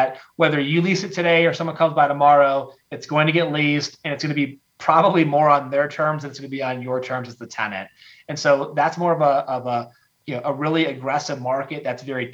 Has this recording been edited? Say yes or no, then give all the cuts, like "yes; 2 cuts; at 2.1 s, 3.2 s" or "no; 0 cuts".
no; 0 cuts